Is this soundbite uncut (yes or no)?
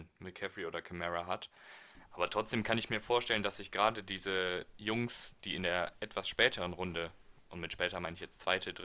no